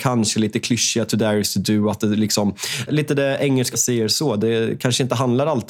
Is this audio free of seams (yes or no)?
no